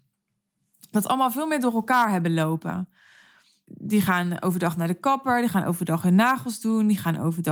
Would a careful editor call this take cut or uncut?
uncut